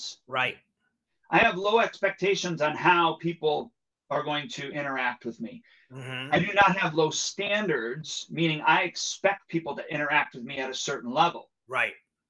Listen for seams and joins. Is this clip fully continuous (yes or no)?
yes